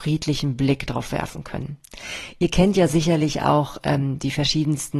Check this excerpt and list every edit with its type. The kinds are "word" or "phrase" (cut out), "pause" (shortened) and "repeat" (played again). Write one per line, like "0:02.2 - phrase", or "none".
none